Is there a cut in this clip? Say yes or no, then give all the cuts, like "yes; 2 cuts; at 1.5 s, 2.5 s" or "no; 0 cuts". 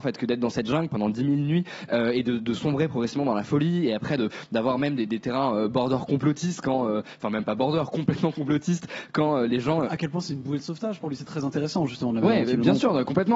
no; 0 cuts